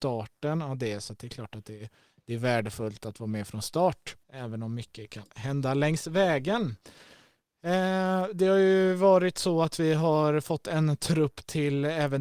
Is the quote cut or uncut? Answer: cut